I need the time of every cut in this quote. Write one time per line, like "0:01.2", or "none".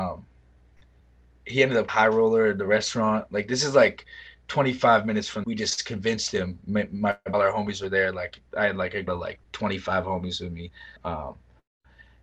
0:01.9
0:05.4
0:07.3
0:08.5
0:09.1
0:11.0